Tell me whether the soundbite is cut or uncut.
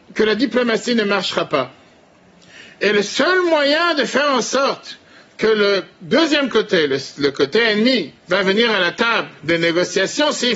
uncut